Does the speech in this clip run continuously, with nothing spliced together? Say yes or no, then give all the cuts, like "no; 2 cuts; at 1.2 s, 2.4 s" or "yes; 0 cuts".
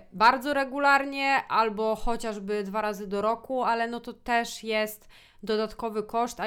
yes; 0 cuts